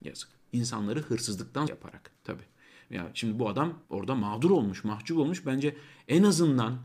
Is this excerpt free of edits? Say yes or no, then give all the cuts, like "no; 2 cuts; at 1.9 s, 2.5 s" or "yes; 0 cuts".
no; 3 cuts; at 1.7 s, 2.2 s, 3.8 s